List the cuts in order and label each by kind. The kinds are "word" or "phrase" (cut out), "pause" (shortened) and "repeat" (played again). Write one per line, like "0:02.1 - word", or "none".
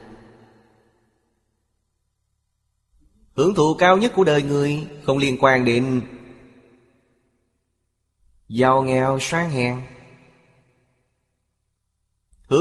none